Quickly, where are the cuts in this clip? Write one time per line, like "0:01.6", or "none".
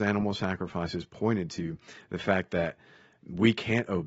none